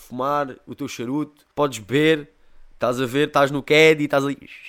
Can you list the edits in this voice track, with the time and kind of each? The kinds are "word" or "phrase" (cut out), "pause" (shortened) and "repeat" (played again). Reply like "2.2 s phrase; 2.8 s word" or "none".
1.5 s pause